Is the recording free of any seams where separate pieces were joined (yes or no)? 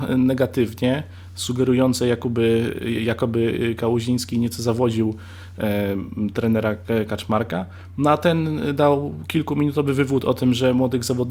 yes